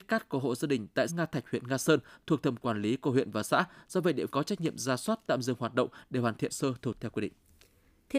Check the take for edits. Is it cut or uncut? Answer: cut